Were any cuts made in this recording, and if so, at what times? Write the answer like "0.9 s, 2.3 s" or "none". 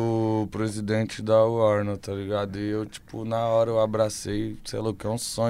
none